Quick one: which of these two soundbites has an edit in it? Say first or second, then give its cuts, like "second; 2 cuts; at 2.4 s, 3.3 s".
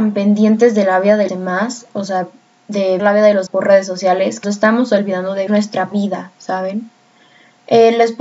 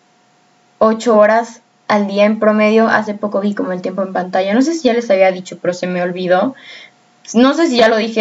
first; 6 cuts; at 1.3 s, 3.0 s, 3.5 s, 4.4 s, 5.5 s, 5.9 s